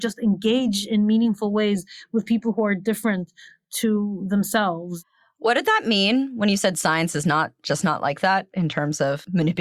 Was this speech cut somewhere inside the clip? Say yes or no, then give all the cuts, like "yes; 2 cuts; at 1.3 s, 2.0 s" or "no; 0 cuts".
no; 0 cuts